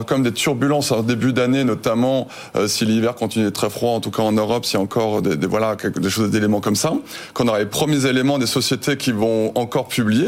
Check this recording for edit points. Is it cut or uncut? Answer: uncut